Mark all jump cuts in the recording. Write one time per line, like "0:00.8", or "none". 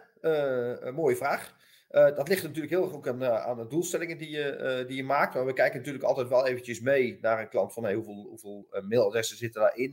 none